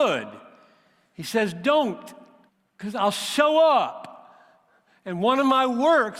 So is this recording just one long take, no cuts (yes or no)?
no